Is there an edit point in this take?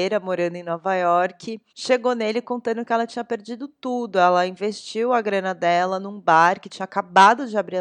yes; 1 cut; at 1.7 s

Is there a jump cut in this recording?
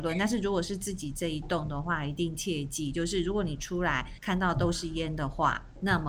yes; 1 cut; at 4.2 s

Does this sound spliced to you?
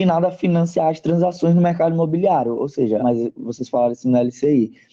yes; 1 cut; at 3.0 s

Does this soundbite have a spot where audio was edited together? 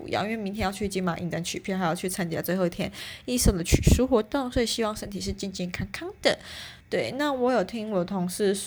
yes; 1 cut; at 6.8 s

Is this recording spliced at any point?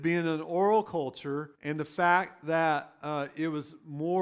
yes; 1 cut; at 1.5 s

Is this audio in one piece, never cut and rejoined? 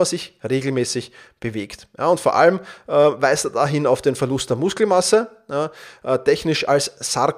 yes; 0 cuts

